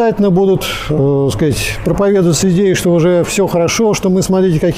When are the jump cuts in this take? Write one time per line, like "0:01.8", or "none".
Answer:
none